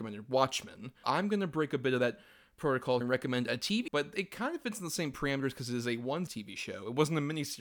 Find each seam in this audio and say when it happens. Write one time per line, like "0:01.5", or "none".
0:01.0
0:03.0
0:03.9
0:06.3